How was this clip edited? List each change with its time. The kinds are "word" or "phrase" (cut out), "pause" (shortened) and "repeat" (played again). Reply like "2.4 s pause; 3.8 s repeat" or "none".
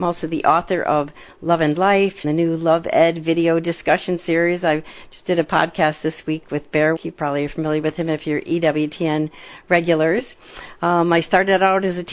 2.2 s phrase; 7.0 s word